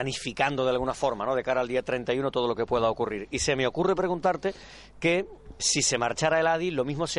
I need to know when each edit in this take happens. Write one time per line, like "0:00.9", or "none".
0:05.6

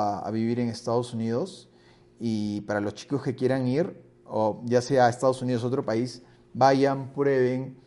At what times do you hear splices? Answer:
none

